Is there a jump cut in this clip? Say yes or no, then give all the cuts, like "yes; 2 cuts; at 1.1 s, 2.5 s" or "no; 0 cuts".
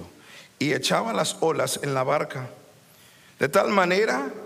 no; 0 cuts